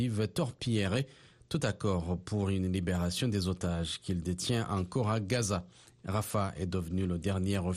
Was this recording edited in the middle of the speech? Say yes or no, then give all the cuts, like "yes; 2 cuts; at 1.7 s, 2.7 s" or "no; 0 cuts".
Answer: no; 0 cuts